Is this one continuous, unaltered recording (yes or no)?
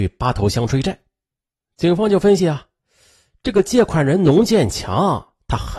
yes